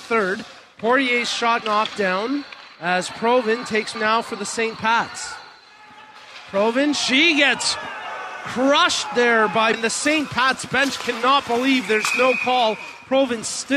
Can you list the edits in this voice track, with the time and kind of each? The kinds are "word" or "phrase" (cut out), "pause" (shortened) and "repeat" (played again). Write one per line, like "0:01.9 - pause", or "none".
0:01.6 - word
0:02.8 - pause
0:03.9 - word
0:09.7 - word